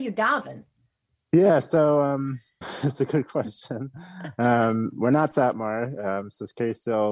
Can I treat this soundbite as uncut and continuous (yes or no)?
no